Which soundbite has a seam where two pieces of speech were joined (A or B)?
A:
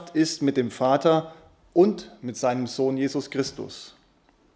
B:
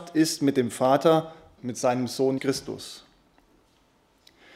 B